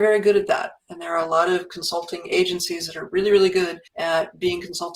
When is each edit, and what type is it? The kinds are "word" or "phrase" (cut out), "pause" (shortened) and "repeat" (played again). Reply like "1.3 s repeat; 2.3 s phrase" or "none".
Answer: 3.9 s pause